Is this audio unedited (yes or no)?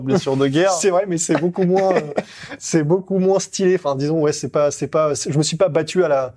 yes